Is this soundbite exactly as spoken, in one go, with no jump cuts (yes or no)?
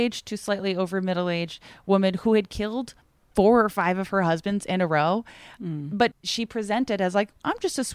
yes